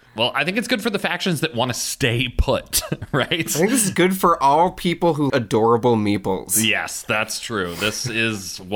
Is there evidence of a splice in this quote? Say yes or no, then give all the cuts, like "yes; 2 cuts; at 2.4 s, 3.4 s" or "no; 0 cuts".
yes; 1 cut; at 5.3 s